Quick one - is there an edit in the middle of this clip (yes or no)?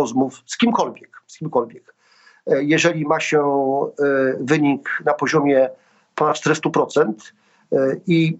no